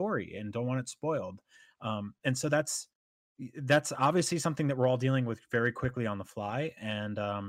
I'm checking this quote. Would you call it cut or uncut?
uncut